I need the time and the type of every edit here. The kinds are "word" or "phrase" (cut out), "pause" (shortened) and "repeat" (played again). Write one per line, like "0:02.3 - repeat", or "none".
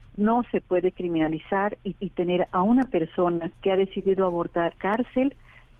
0:02.0 - repeat
0:03.5 - pause
0:04.7 - phrase